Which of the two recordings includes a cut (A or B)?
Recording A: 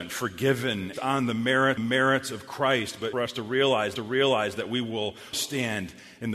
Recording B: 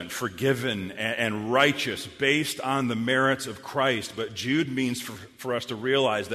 A